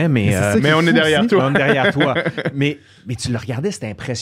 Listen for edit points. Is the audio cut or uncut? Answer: uncut